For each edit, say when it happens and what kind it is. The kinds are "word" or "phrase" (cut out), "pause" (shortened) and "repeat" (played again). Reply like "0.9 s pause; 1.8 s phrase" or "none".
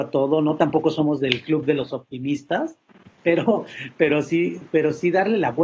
3.1 s pause